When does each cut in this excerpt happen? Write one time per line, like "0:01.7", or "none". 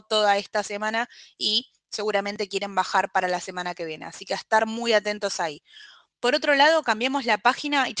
none